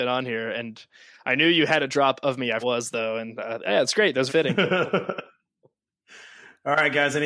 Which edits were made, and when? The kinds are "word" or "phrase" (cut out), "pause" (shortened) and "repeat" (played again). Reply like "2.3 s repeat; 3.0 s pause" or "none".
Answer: 2.6 s phrase; 4.3 s word